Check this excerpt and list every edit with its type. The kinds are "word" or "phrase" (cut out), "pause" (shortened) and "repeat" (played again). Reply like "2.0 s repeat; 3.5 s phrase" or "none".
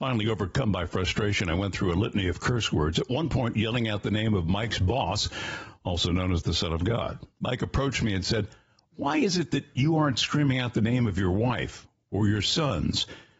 7.3 s pause